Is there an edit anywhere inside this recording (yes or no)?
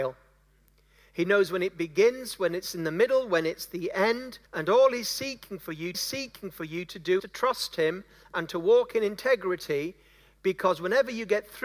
yes